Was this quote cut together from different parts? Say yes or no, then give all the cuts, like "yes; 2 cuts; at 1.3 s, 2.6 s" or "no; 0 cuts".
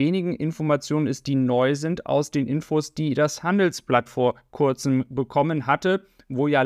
yes; 1 cut; at 4.1 s